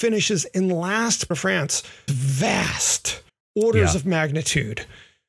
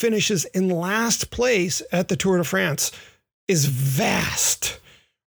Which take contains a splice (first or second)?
first